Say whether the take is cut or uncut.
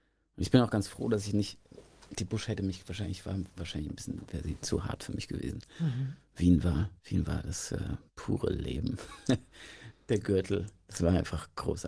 cut